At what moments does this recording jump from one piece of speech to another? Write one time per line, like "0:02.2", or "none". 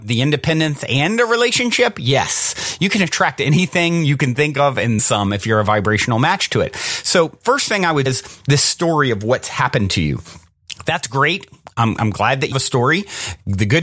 0:05.0
0:08.1
0:12.5